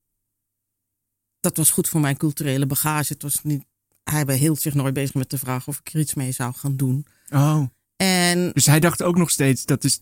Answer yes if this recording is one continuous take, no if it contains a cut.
yes